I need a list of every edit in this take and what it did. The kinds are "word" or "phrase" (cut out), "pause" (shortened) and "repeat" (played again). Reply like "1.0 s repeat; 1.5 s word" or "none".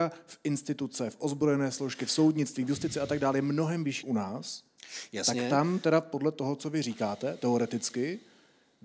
4.0 s word